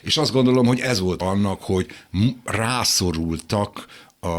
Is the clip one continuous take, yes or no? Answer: no